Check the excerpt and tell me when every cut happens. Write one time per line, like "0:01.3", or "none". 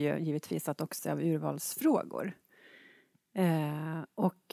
0:01.0